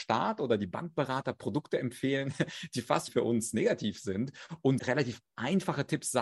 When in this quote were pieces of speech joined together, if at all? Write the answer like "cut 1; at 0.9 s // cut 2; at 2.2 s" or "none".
cut 1; at 3.1 s // cut 2; at 4.8 s

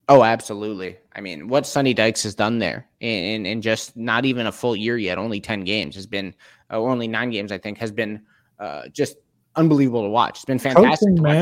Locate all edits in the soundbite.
none

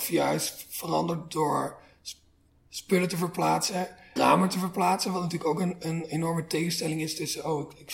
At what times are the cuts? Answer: cut 1; at 4.2 s

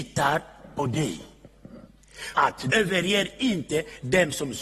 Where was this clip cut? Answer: cut 1; at 2.3 s // cut 2; at 2.7 s

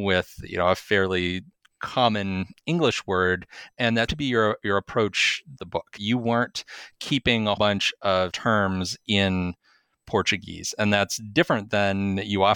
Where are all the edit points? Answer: cut 1; at 4.1 s // cut 2; at 5.6 s // cut 3; at 6.0 s // cut 4; at 7.6 s // cut 5; at 8.3 s

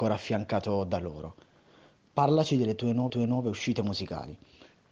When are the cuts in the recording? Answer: cut 1; at 3.1 s

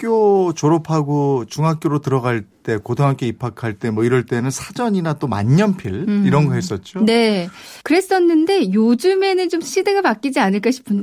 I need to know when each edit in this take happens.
cut 1; at 7.8 s

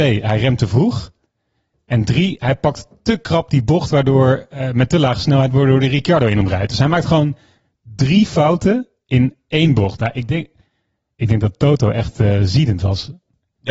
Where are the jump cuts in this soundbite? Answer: none

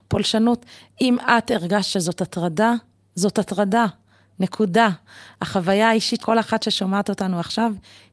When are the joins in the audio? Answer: cut 1; at 6.2 s

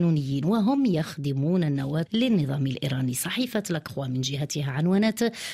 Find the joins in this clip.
cut 1; at 2.1 s

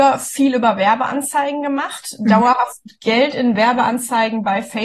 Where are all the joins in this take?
none

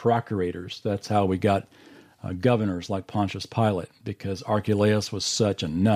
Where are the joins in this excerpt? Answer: none

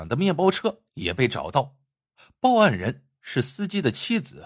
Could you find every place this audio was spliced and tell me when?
none

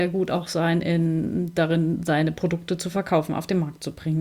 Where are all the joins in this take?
none

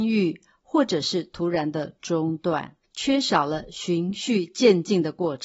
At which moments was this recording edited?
cut 1; at 2.8 s

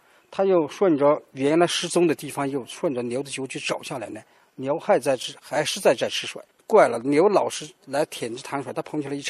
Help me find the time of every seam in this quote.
cut 1; at 6.5 s

